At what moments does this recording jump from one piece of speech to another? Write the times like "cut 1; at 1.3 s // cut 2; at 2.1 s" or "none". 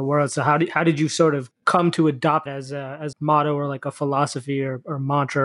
cut 1; at 2.5 s // cut 2; at 3.1 s